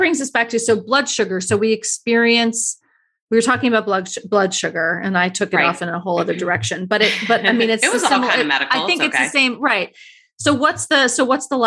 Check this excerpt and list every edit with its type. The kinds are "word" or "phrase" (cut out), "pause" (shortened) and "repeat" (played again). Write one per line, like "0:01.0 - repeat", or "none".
none